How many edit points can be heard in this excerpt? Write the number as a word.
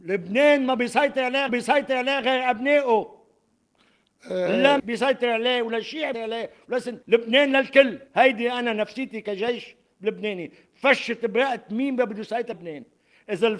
six